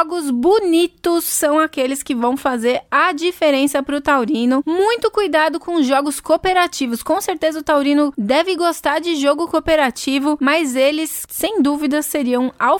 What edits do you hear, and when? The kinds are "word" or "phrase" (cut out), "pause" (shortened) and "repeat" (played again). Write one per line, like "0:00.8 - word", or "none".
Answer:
none